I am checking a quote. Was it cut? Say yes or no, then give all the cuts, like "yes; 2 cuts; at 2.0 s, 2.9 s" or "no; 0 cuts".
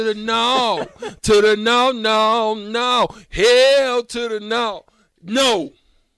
no; 0 cuts